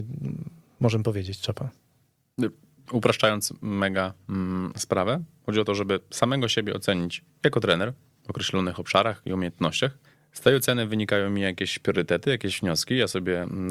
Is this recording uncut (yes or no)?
yes